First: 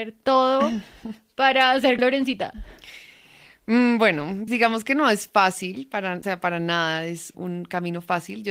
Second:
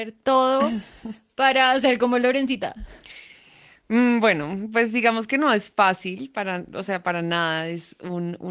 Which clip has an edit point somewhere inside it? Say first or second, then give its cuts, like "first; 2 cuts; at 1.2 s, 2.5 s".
first; 4 cuts; at 2.0 s, 4.5 s, 6.2 s, 7.3 s